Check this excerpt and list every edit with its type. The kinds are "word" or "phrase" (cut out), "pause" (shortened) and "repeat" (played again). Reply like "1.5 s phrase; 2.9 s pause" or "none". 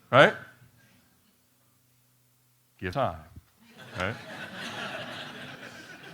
2.9 s word